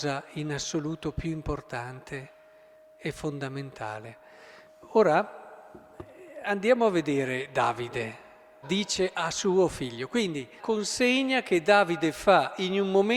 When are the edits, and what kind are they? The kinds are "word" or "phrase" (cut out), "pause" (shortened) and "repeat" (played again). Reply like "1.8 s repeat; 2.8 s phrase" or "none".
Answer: 8.6 s word; 10.6 s word